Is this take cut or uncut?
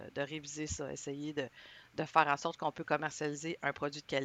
uncut